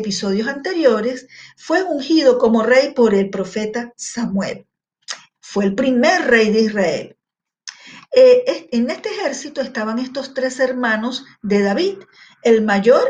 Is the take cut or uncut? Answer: uncut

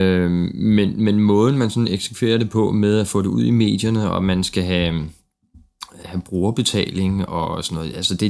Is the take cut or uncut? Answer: cut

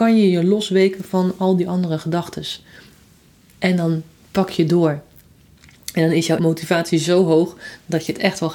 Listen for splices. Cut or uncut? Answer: cut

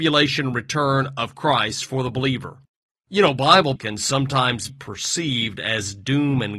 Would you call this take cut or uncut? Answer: cut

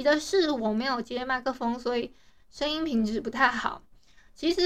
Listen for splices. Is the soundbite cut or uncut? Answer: uncut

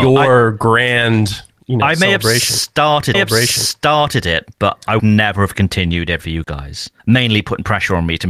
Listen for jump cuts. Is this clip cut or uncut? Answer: cut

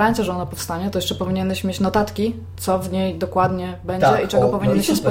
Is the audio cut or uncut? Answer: uncut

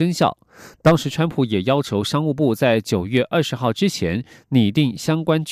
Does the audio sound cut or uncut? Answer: uncut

